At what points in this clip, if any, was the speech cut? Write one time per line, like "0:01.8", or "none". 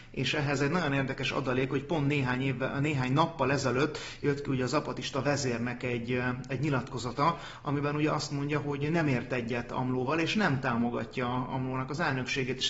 none